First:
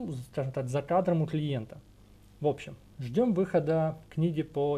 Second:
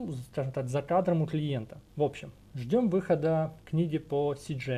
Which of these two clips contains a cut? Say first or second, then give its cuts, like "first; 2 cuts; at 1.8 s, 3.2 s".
second; 1 cut; at 1.9 s